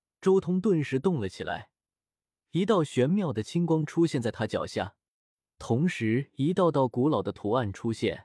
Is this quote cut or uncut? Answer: uncut